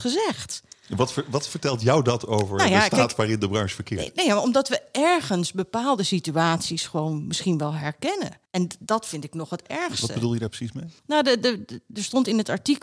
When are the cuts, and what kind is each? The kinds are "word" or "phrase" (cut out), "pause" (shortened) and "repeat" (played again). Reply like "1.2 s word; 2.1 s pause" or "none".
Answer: 8.5 s pause; 11.0 s pause